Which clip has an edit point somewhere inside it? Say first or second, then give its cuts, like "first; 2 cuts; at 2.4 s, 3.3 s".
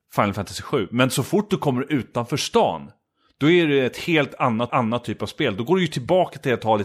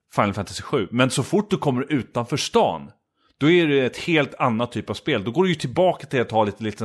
first; 1 cut; at 4.7 s